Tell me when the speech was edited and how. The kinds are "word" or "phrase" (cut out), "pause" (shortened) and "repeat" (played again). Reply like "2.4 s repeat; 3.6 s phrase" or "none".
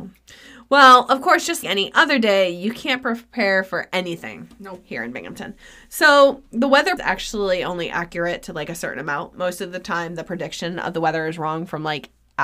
1.6 s word; 7.0 s phrase